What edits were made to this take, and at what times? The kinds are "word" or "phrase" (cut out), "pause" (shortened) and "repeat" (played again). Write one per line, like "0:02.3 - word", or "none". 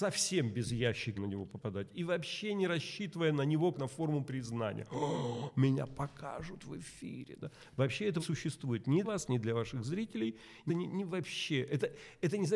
0:01.2 - phrase
0:03.7 - word
0:08.2 - word
0:09.0 - word
0:10.7 - phrase